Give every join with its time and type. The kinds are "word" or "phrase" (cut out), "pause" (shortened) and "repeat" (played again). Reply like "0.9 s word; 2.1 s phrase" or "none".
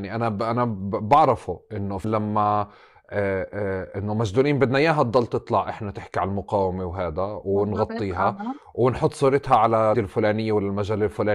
2.0 s word; 9.9 s word